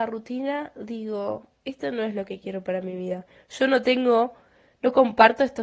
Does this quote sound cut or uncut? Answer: uncut